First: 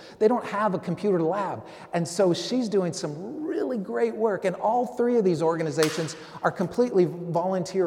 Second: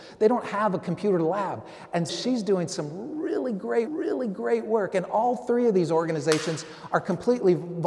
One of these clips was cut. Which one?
second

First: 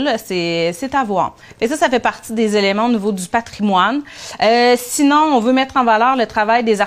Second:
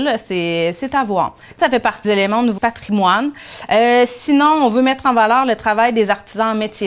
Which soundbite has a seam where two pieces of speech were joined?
second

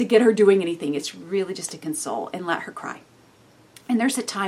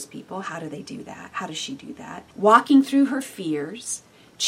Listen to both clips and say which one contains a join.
second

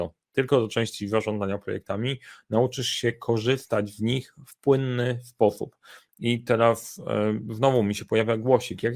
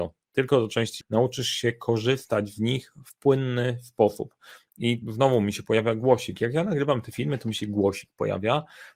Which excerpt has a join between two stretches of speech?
second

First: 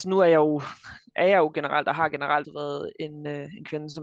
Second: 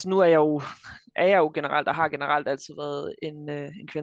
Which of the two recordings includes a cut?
first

